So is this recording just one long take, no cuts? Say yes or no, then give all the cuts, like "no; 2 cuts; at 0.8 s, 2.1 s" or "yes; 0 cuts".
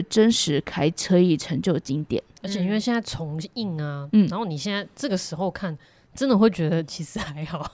yes; 0 cuts